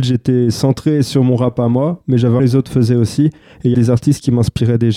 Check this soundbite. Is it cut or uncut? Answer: cut